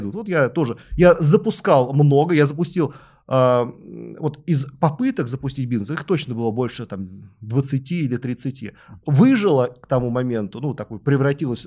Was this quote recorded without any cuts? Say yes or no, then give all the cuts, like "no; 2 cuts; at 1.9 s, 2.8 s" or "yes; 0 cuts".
yes; 0 cuts